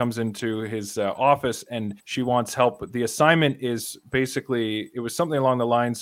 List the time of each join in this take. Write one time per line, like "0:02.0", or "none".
0:02.0